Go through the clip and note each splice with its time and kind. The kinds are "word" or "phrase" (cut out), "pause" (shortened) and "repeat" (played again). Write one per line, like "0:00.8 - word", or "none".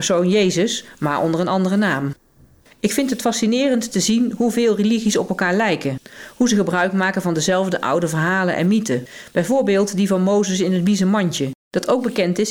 none